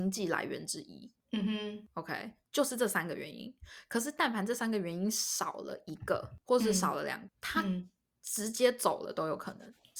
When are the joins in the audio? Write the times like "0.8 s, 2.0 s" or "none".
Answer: 7.3 s